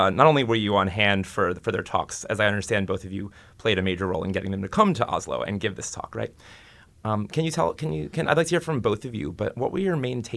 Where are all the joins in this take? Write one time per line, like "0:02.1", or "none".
none